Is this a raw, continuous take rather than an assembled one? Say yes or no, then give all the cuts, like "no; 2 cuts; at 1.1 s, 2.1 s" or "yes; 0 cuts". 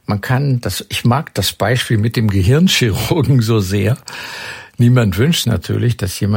no; 1 cut; at 5.4 s